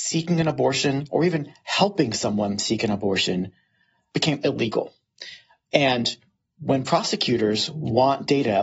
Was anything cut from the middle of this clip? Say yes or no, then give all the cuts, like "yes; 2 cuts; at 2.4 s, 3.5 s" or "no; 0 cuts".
no; 0 cuts